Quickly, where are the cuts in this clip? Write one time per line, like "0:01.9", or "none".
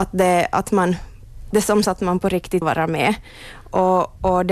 0:01.5
0:01.8
0:02.6